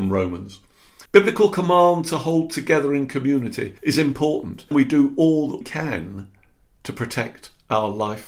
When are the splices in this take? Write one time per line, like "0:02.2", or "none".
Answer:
0:01.1
0:03.8
0:04.7
0:05.6